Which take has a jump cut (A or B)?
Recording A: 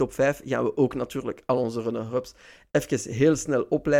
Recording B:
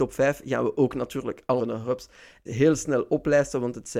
B